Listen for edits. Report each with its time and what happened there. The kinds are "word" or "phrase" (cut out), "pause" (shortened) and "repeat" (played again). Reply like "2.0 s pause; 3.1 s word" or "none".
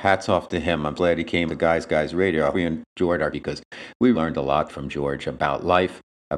1.0 s word; 1.5 s word; 2.5 s word; 3.3 s word; 4.1 s word; 4.7 s word